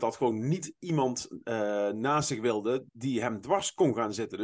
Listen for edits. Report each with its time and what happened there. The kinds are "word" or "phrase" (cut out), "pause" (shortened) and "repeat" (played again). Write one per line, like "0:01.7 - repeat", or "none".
0:02.9 - pause